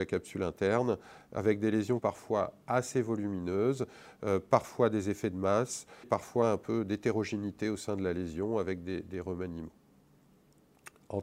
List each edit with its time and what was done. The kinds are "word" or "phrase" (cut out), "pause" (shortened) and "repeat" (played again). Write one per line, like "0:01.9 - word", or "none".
0:02.0 - phrase
0:06.0 - phrase